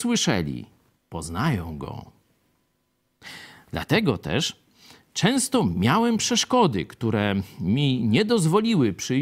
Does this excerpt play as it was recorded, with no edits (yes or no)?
yes